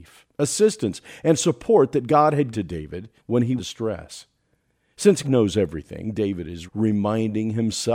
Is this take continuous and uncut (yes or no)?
no